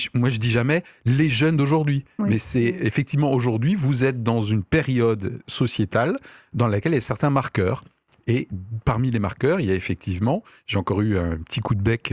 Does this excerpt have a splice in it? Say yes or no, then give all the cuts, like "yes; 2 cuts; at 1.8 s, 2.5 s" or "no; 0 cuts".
no; 0 cuts